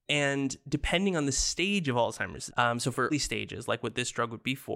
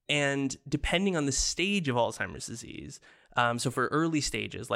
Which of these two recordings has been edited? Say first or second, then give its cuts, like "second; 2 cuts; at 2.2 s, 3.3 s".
first; 2 cuts; at 2.5 s, 3.1 s